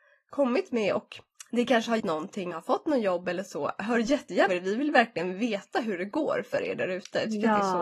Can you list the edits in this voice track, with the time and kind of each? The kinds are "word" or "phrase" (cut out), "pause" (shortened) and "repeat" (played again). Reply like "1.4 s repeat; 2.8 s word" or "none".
1.4 s pause; 2.0 s word; 2.5 s phrase; 4.5 s word